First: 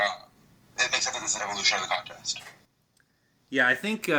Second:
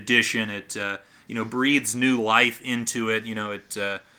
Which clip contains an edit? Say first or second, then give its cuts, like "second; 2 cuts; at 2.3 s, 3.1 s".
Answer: first; 1 cut; at 1.4 s